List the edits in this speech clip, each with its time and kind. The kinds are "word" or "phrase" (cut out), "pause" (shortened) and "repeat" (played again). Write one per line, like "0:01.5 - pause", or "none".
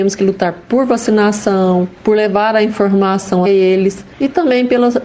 0:02.0 - pause
0:03.5 - word
0:04.1 - pause